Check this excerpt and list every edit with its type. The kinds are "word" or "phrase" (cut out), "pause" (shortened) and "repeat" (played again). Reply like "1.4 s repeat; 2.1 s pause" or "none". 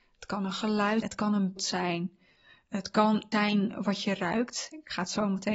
1.0 s word; 1.6 s word; 3.3 s word